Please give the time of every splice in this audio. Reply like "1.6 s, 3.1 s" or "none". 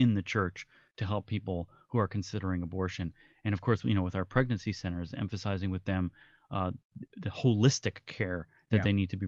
none